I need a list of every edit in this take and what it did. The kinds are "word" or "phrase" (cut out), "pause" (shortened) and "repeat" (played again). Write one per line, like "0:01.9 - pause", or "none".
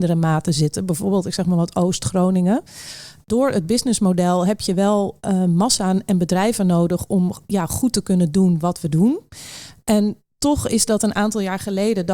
none